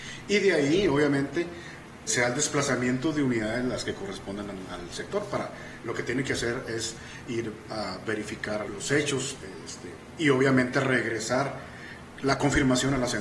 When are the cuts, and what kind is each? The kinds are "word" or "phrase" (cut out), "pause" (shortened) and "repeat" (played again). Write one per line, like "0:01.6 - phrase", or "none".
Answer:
0:02.1 - word
0:08.6 - word